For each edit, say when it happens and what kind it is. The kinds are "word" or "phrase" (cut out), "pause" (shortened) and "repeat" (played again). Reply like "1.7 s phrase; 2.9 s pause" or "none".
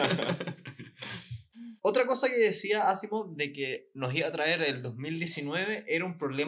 1.8 s pause